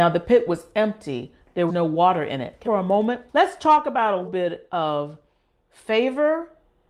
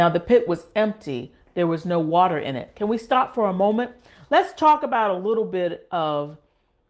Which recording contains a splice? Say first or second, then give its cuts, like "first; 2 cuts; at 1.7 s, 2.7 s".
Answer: first; 4 cuts; at 1.7 s, 2.6 s, 3.3 s, 4.2 s